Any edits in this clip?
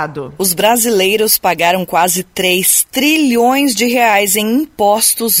no; 0 cuts

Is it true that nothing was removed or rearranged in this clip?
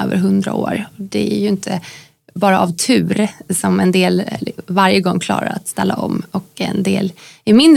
yes; 0 cuts

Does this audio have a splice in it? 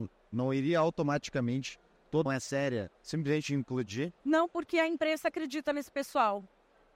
yes; 3 cuts; at 2.3 s, 3.0 s, 4.2 s

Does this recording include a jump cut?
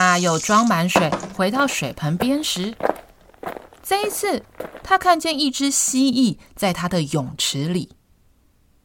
no; 0 cuts

